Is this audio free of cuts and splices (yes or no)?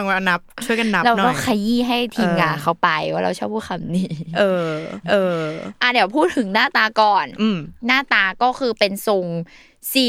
no